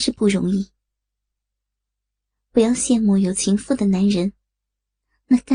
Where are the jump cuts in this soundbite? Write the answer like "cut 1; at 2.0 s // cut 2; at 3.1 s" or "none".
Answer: none